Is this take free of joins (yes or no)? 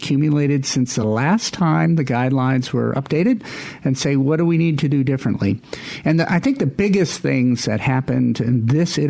yes